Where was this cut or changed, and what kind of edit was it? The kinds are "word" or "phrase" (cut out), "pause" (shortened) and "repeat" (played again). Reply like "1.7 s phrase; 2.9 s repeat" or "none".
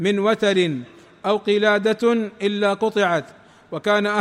none